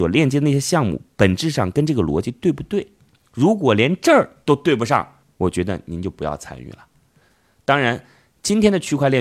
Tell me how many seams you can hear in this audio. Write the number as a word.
one